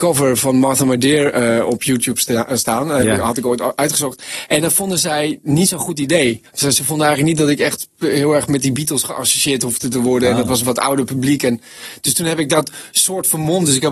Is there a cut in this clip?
yes; 1 cut; at 6.5 s

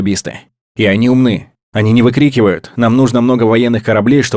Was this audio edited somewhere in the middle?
no; 0 cuts

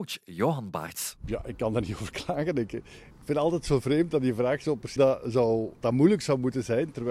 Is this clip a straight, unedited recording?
no; 2 cuts; at 5.0 s, 5.8 s

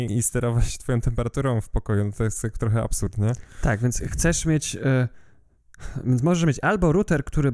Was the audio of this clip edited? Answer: no; 0 cuts

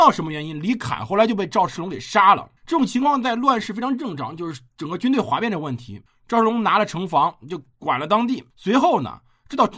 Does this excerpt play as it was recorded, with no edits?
no; 3 cuts; at 2.6 s, 6.1 s, 8.5 s

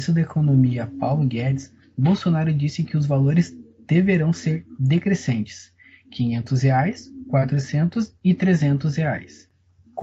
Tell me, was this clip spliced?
no; 0 cuts

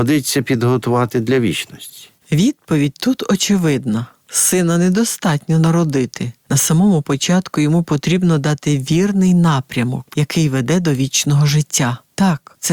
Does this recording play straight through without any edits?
yes; 0 cuts

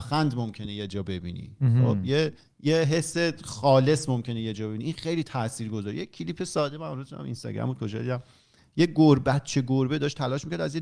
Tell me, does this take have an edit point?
yes; 1 cut; at 2.4 s

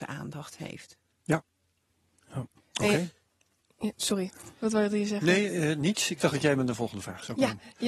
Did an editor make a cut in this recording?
no; 0 cuts

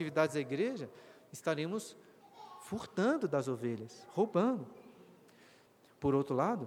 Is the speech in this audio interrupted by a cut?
no; 0 cuts

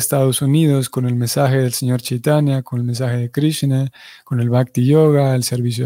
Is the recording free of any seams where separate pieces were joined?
yes; 0 cuts

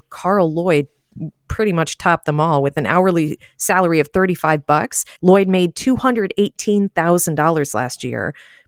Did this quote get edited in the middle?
yes; 1 cut; at 5.2 s

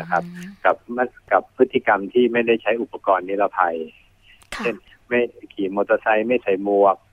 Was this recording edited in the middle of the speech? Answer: no; 0 cuts

